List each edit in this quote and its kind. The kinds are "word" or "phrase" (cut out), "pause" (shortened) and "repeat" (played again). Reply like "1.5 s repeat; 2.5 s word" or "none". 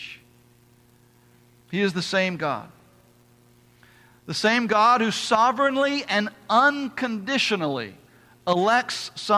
none